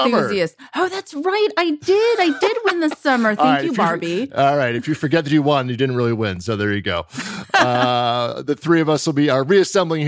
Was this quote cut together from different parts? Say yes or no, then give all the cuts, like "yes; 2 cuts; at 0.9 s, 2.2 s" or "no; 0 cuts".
no; 0 cuts